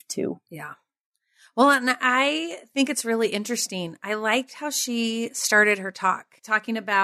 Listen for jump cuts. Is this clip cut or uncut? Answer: uncut